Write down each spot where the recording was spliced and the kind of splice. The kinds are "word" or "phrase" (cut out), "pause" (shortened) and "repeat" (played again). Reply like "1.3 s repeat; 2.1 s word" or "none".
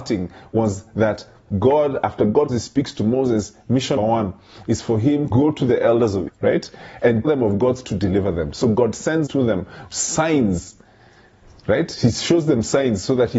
1.5 s word; 2.5 s word; 4.0 s word; 5.3 s word; 6.3 s word; 7.2 s word; 7.8 s word; 9.3 s word; 9.9 s word